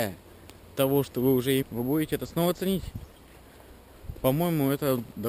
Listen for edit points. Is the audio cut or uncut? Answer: cut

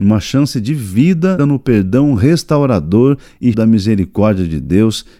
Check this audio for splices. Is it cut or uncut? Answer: cut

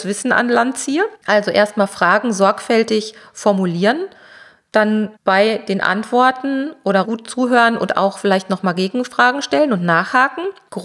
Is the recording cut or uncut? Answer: cut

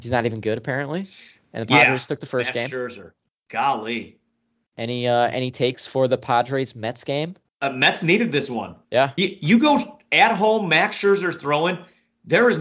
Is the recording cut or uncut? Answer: cut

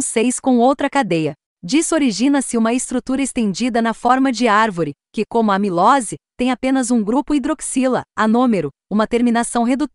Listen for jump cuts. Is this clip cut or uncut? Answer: uncut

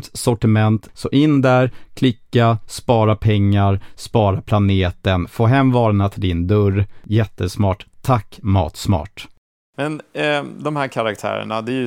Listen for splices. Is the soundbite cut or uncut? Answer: uncut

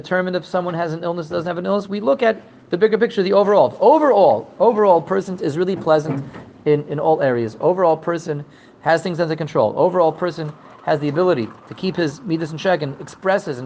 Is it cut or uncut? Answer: uncut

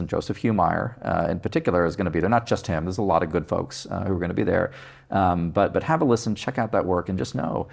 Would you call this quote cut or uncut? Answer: uncut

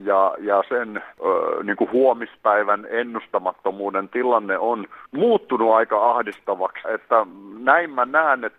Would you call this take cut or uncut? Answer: cut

